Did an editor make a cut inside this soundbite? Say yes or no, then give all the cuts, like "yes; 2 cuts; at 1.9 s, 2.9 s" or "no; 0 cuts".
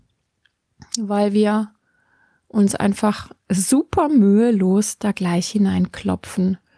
yes; 1 cut; at 3.4 s